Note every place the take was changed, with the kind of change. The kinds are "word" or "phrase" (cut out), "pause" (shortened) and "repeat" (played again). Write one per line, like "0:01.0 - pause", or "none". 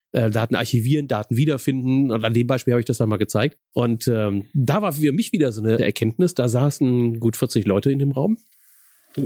0:03.6 - pause
0:05.8 - word